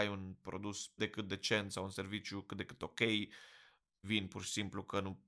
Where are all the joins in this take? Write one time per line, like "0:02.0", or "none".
0:01.0
0:04.0